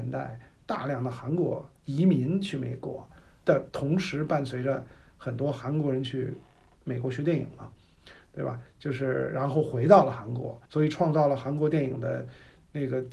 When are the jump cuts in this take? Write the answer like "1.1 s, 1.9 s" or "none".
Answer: 1.8 s, 10.7 s